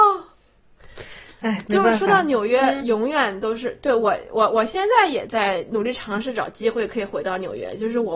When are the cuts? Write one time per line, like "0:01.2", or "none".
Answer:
none